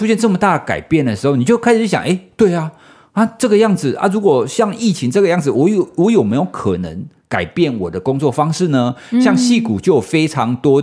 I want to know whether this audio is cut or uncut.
uncut